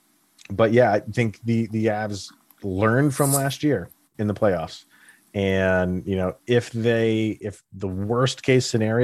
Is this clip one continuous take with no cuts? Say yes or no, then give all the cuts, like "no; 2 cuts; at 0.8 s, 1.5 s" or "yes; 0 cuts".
yes; 0 cuts